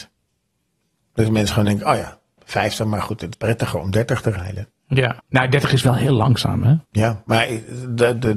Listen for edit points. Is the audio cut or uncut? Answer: cut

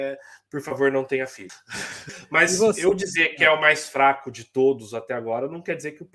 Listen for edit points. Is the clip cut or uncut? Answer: uncut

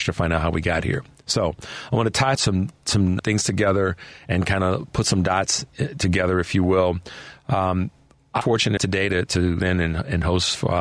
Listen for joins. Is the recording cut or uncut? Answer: cut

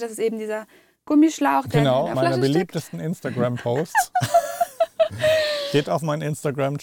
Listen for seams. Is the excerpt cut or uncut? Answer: cut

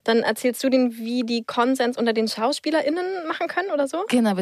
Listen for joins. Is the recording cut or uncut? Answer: uncut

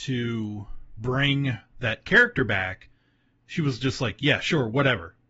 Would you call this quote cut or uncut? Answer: uncut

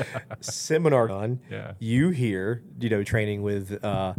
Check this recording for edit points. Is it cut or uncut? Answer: cut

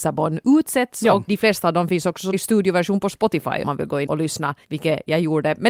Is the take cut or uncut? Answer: cut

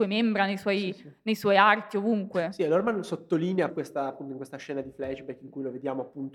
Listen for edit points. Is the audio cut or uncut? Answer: cut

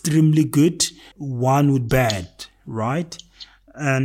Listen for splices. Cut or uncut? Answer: cut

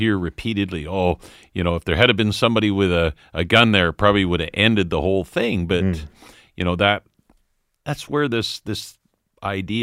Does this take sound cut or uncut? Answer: uncut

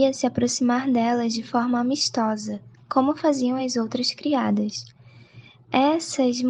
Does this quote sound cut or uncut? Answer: uncut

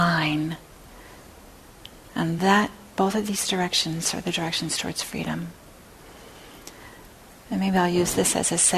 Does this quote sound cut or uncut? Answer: uncut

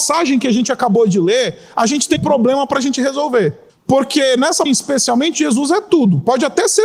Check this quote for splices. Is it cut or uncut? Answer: cut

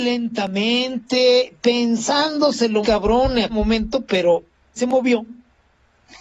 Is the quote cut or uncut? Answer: cut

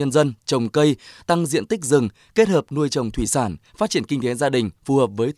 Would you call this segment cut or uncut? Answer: uncut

